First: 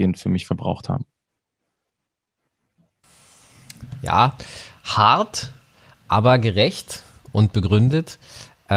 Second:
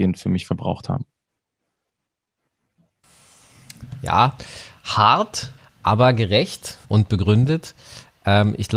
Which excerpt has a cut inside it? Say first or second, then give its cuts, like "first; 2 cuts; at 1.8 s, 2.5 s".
second; 2 cuts; at 5.6 s, 6.8 s